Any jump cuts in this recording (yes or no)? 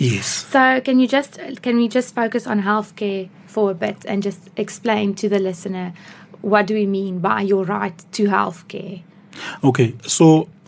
no